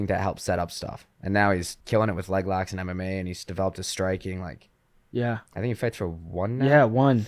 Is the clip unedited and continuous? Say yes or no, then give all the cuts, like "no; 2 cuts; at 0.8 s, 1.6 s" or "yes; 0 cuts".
no; 2 cuts; at 1.8 s, 5.5 s